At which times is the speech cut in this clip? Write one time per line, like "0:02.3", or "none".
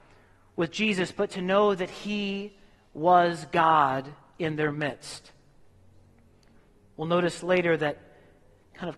none